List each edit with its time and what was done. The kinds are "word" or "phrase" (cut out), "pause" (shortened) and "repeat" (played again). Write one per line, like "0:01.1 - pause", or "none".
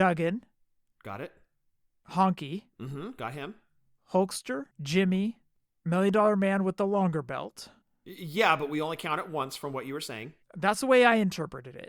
0:02.7 - pause
0:04.7 - pause
0:07.8 - pause
0:10.4 - pause